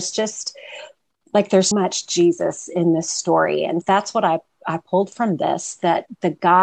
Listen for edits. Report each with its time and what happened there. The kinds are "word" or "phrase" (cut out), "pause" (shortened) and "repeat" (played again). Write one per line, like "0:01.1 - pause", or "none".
0:01.7 - word
0:03.8 - word